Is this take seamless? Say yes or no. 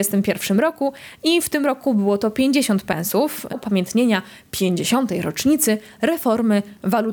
no